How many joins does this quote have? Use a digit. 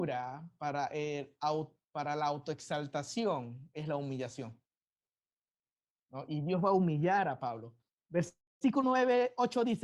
0